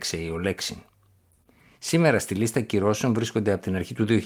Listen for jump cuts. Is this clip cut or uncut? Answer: uncut